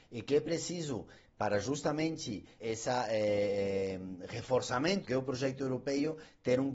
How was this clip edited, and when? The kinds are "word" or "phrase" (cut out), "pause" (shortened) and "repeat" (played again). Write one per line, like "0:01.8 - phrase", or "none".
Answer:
0:02.6 - word
0:05.0 - word